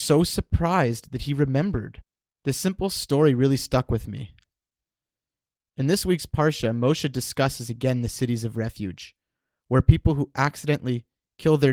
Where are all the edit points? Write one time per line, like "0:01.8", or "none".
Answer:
none